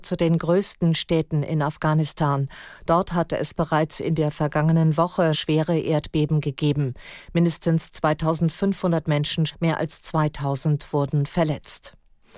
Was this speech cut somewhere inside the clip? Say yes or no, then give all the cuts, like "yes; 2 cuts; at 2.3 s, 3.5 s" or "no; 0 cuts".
yes; 2 cuts; at 5.3 s, 9.5 s